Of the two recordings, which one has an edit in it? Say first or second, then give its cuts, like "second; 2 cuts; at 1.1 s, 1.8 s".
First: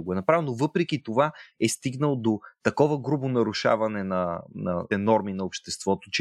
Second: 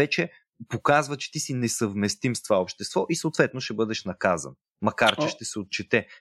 first; 1 cut; at 4.9 s